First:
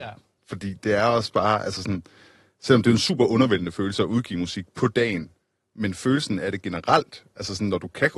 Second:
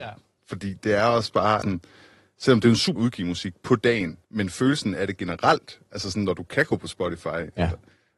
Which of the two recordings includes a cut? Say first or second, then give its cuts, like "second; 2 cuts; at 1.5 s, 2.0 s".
second; 3 cuts; at 1.6 s, 3.0 s, 4.2 s